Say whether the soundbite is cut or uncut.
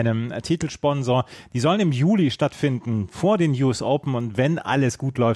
uncut